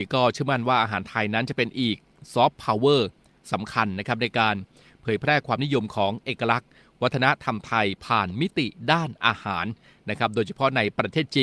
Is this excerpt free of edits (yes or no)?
yes